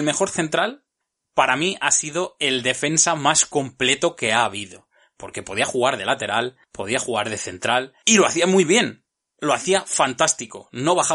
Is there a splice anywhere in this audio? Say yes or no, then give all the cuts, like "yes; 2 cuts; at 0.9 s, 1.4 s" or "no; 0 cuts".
no; 0 cuts